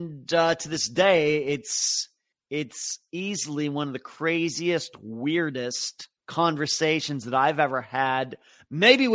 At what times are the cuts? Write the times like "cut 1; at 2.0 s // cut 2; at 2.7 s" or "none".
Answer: cut 1; at 2.3 s // cut 2; at 6.2 s